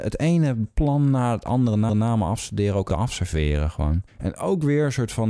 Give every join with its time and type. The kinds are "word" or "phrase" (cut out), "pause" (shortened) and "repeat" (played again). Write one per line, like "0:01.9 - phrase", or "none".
0:01.9 - repeat
0:02.9 - word
0:04.1 - pause